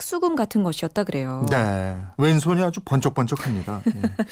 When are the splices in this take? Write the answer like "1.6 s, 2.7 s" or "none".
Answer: 2.1 s